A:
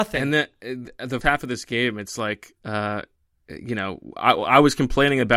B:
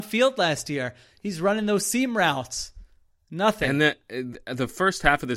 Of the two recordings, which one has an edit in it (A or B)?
A